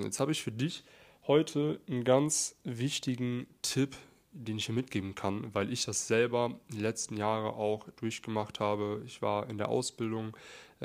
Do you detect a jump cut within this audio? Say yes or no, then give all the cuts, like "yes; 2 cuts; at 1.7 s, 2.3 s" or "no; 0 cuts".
no; 0 cuts